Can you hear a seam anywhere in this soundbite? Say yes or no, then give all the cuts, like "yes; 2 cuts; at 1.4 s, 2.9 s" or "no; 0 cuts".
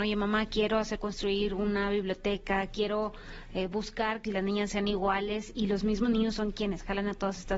yes; 2 cuts; at 1.0 s, 4.2 s